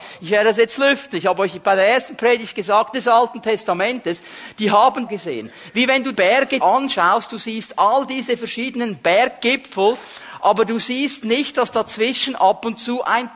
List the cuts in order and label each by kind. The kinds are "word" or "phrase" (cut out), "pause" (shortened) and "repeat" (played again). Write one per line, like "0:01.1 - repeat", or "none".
0:02.9 - phrase
0:05.1 - phrase
0:06.1 - word
0:06.6 - word